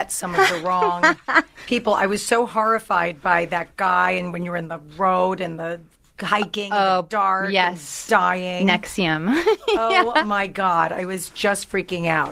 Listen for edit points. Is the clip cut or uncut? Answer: uncut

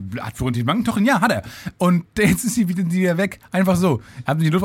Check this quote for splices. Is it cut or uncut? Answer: uncut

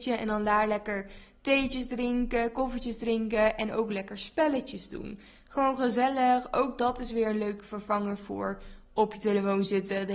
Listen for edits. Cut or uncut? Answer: uncut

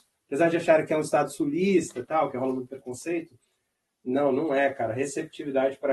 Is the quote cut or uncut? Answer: uncut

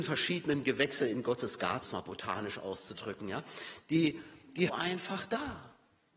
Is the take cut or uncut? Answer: cut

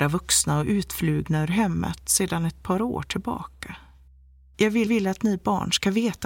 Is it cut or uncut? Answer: cut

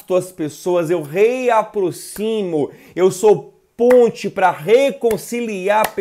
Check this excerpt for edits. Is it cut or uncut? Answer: uncut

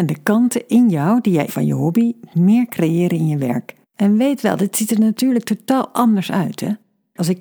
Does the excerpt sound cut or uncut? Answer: cut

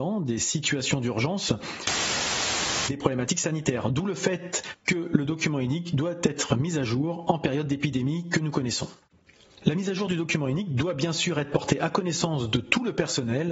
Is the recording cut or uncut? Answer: uncut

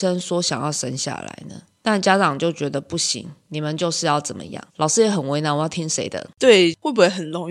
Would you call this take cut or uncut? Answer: cut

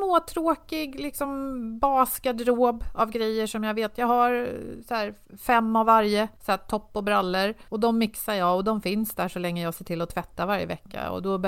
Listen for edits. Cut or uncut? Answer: cut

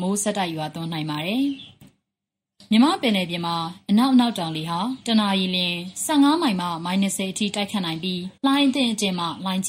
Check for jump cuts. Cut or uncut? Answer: cut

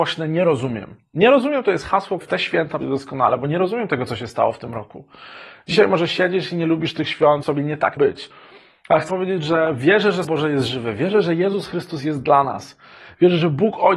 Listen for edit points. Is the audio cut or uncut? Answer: cut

